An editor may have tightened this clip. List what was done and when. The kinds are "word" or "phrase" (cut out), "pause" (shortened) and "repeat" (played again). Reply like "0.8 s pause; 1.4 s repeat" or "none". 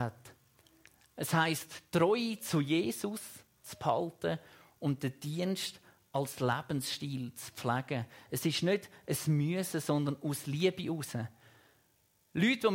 none